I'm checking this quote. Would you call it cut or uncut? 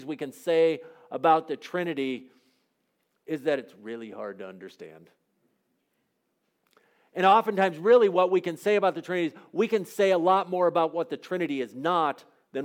uncut